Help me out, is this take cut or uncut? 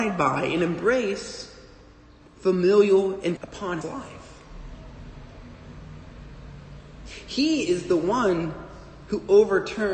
cut